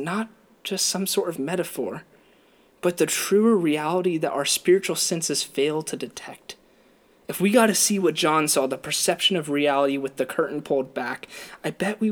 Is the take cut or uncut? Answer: uncut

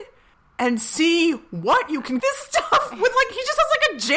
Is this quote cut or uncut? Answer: cut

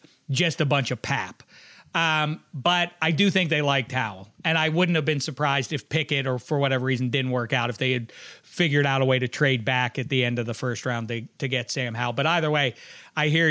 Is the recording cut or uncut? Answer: uncut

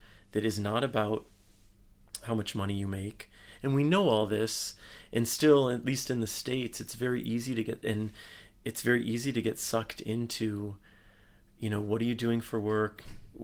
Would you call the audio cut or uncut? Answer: uncut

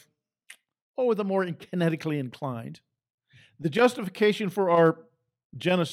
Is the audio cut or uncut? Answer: uncut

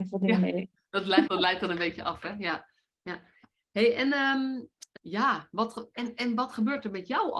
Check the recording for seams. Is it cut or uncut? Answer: cut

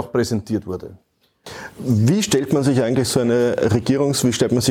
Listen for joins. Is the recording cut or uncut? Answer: uncut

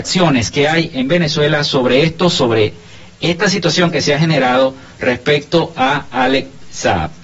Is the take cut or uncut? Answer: uncut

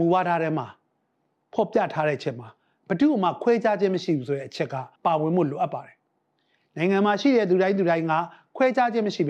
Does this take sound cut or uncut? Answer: cut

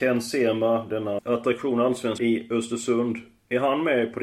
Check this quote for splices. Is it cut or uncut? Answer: cut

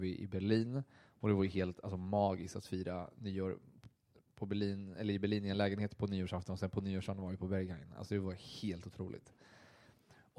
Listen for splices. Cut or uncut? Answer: uncut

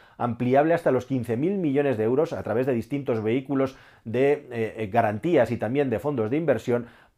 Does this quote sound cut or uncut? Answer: uncut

